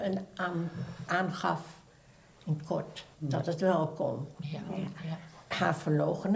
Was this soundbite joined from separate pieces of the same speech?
yes; 2 cuts; at 1.1 s, 3.1 s

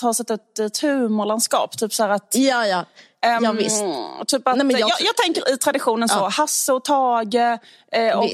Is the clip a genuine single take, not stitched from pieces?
yes; 0 cuts

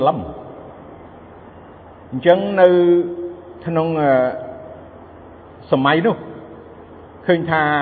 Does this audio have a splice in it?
no; 0 cuts

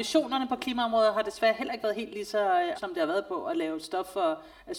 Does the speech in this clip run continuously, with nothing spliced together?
no; 1 cut; at 2.7 s

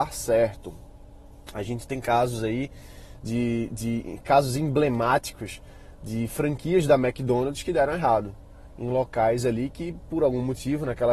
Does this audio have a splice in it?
no; 0 cuts

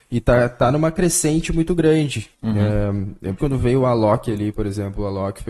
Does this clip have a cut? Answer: yes; 2 cuts; at 2.3 s, 3.4 s

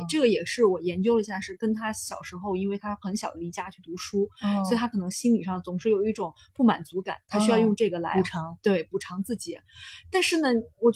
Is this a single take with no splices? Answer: yes; 0 cuts

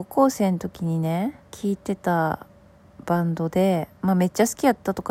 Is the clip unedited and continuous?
no; 1 cut; at 1.4 s

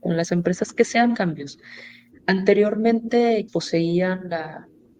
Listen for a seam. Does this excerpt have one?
yes; 2 cuts; at 1.1 s, 3.5 s

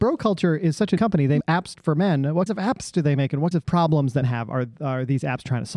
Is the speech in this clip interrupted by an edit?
yes; 6 cuts; at 1.0 s, 1.4 s, 1.8 s, 2.5 s, 3.5 s, 4.2 s

